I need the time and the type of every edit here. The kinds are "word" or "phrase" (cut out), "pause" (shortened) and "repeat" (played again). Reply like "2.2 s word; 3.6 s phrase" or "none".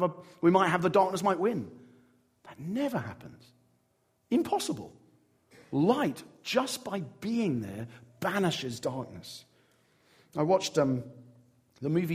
none